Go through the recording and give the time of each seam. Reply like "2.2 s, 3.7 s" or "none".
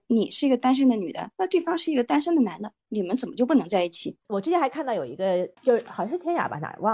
1.3 s